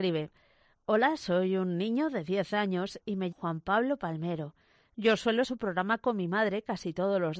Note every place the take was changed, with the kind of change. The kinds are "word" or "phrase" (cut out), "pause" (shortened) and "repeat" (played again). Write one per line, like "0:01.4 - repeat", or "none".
0:03.3 - word
0:05.4 - word